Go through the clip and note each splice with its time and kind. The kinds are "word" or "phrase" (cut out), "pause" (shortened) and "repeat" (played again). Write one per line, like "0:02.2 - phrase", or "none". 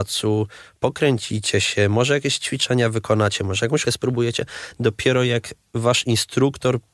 0:03.8 - word